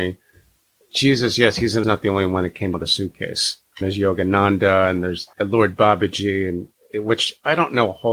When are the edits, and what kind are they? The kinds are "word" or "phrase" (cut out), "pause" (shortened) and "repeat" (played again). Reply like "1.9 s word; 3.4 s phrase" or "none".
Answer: 1.8 s phrase; 2.7 s word; 5.3 s pause